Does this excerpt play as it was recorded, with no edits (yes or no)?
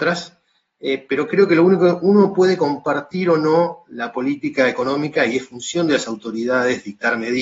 yes